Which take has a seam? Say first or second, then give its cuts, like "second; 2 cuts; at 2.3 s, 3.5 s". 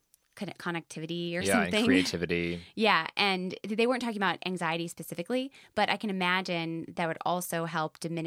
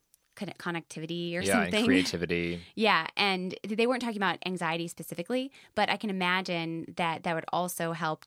first; 1 cut; at 6.9 s